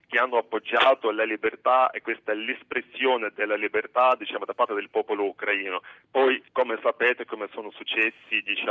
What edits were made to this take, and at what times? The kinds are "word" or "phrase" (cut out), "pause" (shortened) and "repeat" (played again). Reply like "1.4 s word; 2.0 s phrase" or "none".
6.5 s pause